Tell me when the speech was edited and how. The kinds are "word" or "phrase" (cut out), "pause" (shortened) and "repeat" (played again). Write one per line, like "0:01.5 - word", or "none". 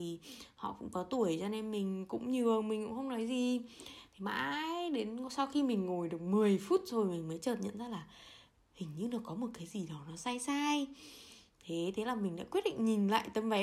none